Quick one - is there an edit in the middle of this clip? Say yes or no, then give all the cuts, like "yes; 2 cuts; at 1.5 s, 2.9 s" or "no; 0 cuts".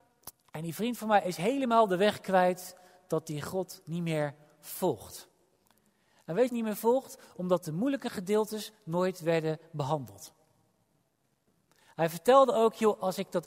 yes; 1 cut; at 6.5 s